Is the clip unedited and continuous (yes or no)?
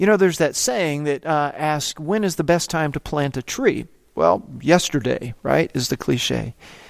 yes